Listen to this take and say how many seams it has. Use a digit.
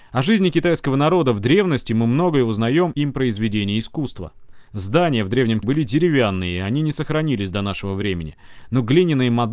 3